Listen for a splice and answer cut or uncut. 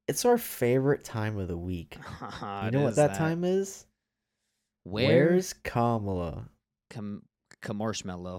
uncut